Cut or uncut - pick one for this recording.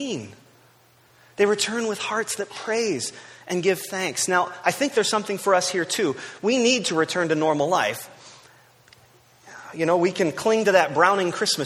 uncut